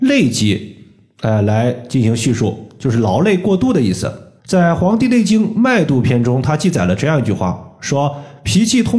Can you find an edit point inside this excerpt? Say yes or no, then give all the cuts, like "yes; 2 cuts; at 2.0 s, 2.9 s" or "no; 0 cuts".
yes; 1 cut; at 4.4 s